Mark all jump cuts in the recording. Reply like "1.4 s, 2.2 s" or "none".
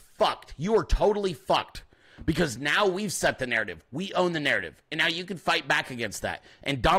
none

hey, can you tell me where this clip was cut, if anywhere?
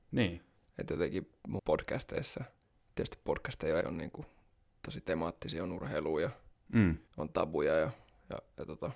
1.6 s, 2.6 s, 3.8 s, 7.1 s

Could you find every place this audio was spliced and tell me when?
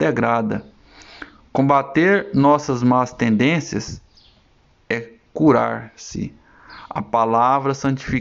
none

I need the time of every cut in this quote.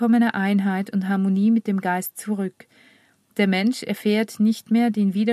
none

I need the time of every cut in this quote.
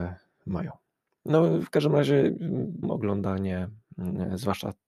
2.8 s

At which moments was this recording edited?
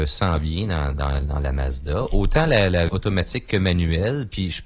2.9 s

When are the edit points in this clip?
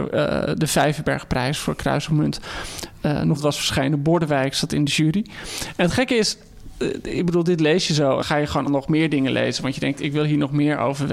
3.4 s, 8.2 s, 8.7 s

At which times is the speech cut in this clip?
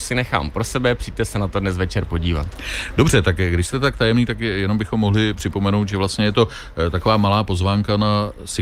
none

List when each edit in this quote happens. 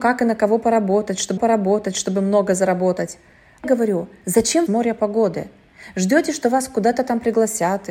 1.4 s, 3.6 s, 4.7 s

